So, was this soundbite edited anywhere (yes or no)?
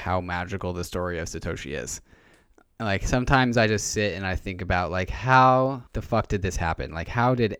yes